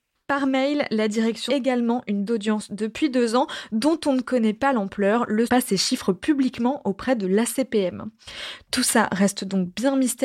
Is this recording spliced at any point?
yes; 3 cuts; at 1.5 s, 2.3 s, 5.5 s

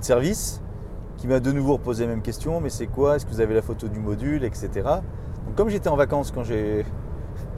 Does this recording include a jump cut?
no; 0 cuts

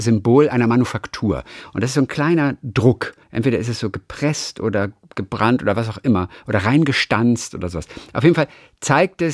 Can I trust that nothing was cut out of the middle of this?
no; 1 cut; at 3.2 s

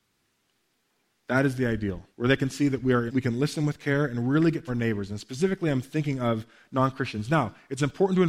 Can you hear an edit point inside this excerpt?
yes; 3 cuts; at 2.1 s, 3.1 s, 4.7 s

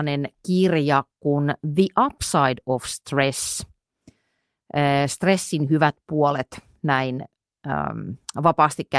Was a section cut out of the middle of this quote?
no; 0 cuts

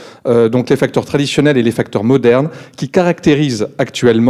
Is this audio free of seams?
yes; 0 cuts

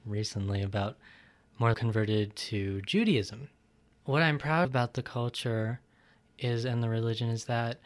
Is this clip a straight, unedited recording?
no; 2 cuts; at 1.7 s, 4.6 s

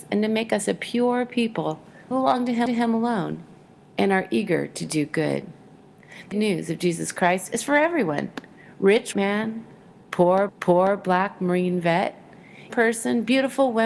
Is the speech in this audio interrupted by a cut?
yes; 6 cuts; at 2.1 s, 2.7 s, 6.3 s, 9.1 s, 10.5 s, 12.7 s

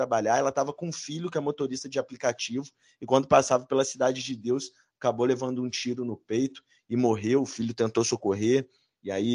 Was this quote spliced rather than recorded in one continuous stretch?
no; 0 cuts

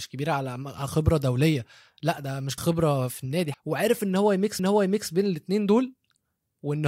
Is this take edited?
yes; 3 cuts; at 2.6 s, 3.5 s, 4.6 s

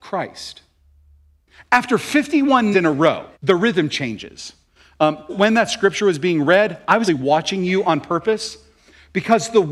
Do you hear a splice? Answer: yes; 4 cuts; at 2.7 s, 3.3 s, 5.3 s, 7.1 s

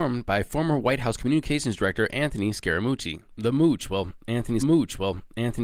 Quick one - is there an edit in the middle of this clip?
yes; 1 cut; at 4.6 s

